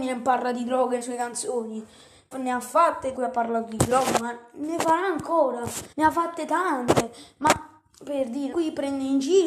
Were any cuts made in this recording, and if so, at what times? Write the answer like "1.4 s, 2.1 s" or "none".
1.0 s, 2.3 s, 3.1 s, 5.9 s, 8.5 s